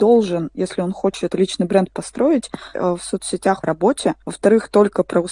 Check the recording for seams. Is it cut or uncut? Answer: cut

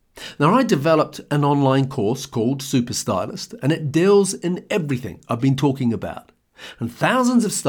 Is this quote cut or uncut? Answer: uncut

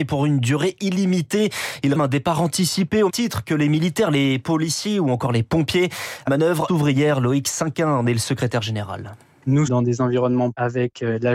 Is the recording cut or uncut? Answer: cut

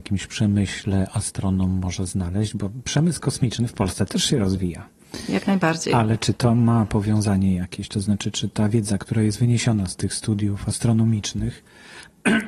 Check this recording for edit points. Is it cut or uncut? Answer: uncut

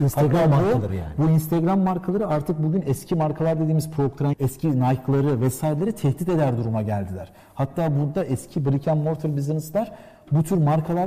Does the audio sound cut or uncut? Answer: cut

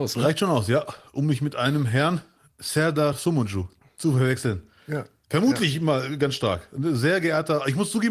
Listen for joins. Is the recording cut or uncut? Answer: uncut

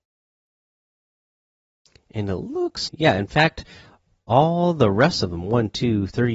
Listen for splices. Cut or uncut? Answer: cut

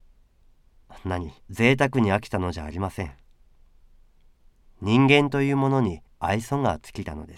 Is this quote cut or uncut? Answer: cut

